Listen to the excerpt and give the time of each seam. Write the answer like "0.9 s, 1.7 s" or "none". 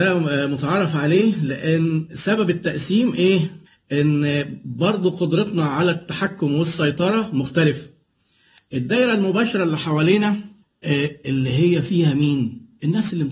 none